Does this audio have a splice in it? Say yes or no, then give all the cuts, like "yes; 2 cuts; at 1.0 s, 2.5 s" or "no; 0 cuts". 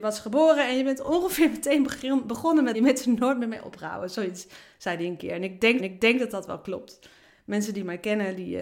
yes; 2 cuts; at 2.7 s, 5.8 s